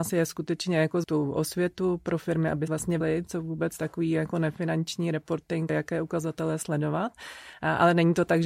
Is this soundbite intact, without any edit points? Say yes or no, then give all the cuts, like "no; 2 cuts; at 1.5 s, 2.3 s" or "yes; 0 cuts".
no; 4 cuts; at 1.0 s, 2.7 s, 3.0 s, 5.7 s